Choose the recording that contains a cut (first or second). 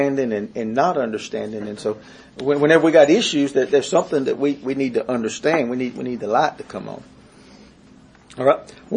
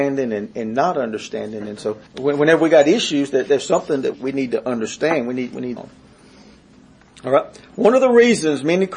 second